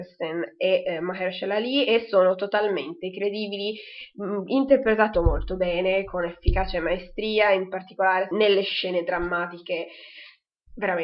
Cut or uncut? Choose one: cut